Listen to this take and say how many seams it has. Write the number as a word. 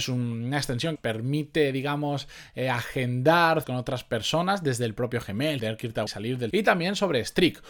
five